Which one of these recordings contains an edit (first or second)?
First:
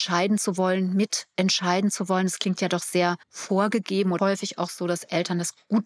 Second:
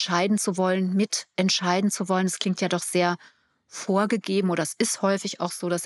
first